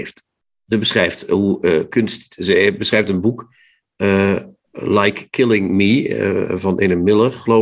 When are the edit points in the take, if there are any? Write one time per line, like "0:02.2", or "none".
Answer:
none